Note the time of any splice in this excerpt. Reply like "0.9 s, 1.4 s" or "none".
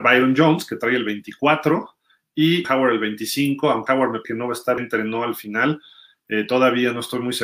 2.6 s, 3.9 s, 4.2 s, 4.8 s